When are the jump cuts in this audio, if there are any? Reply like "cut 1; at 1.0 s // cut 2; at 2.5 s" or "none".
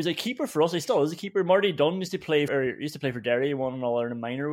cut 1; at 2.5 s